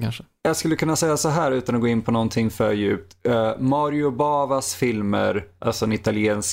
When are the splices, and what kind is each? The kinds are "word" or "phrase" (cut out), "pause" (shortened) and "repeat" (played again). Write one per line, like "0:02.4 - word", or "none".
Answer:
none